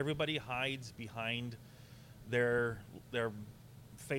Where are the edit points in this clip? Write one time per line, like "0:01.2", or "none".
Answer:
none